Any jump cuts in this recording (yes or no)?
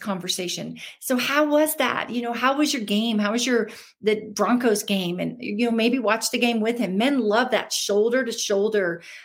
no